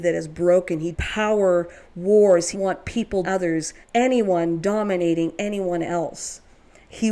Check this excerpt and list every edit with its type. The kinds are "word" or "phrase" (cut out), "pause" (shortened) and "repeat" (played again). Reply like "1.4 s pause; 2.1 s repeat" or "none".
0.9 s phrase; 2.5 s word; 3.2 s word; 3.8 s pause